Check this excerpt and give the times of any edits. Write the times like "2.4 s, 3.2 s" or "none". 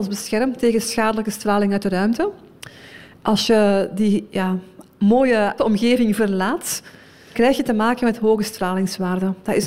5.6 s, 7.3 s